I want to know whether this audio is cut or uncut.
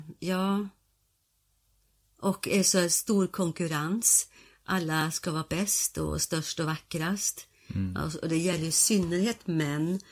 uncut